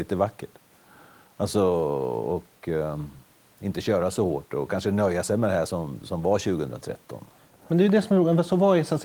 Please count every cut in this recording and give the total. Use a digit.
0